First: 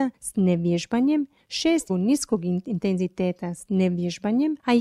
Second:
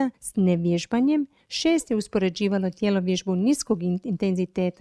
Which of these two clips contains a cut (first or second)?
first